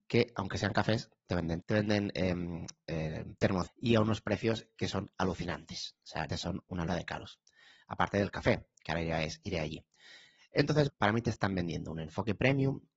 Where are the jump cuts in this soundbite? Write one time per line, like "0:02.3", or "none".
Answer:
0:01.3
0:01.6
0:03.7
0:06.3
0:06.9
0:10.9